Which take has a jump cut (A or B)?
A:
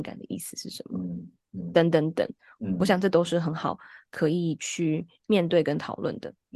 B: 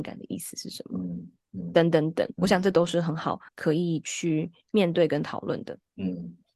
B